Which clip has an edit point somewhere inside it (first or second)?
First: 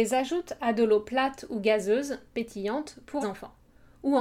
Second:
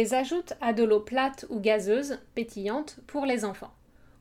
first